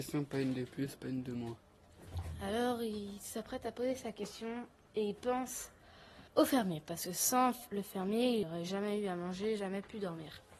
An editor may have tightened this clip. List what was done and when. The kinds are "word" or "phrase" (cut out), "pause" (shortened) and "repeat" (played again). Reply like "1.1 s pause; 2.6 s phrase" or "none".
6.3 s pause; 8.4 s word